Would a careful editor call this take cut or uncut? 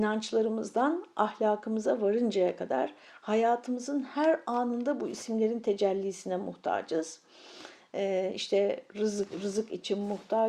uncut